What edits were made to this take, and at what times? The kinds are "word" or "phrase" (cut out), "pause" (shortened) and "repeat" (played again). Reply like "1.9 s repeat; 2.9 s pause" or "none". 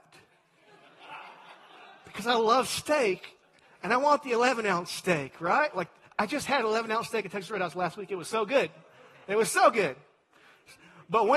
none